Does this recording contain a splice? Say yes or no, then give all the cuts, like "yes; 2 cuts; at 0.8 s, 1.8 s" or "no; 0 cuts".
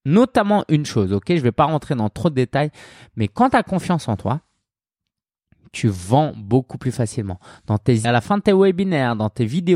yes; 1 cut; at 8.0 s